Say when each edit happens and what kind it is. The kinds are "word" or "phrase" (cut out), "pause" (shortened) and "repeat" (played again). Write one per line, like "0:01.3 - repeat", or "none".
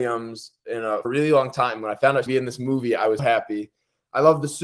0:01.0 - word
0:02.3 - phrase
0:03.2 - word